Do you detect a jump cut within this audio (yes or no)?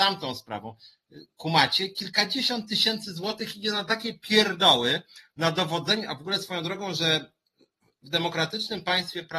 no